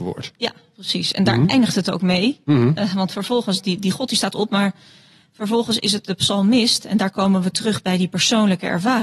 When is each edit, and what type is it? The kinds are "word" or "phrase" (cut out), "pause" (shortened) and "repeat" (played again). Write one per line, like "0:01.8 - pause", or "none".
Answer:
none